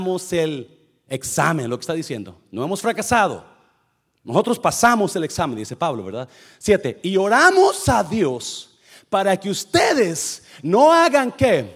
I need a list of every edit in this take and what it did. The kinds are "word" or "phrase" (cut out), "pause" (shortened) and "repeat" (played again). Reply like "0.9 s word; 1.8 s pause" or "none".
none